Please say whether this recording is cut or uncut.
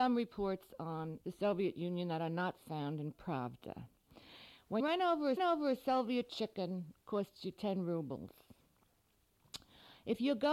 cut